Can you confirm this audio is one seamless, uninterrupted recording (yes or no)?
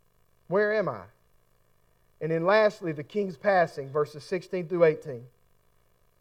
yes